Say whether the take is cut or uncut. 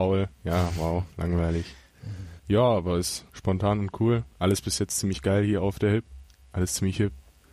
cut